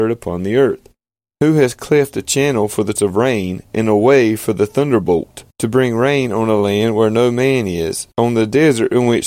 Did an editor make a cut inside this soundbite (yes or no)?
yes